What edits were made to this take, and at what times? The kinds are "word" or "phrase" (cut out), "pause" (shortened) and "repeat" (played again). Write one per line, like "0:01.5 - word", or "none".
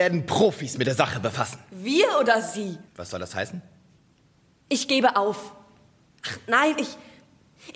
0:02.9 - pause